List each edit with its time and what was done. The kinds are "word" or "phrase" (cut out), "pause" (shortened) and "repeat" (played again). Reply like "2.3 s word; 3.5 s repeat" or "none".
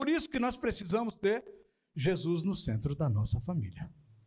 none